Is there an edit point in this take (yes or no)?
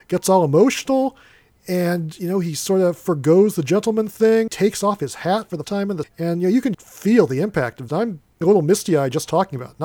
yes